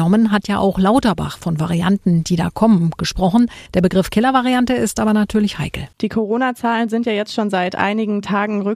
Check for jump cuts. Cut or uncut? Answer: cut